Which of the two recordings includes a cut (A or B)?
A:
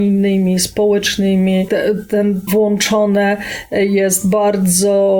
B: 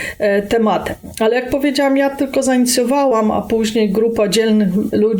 A